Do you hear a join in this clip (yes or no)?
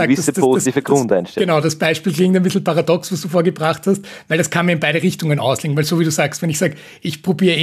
no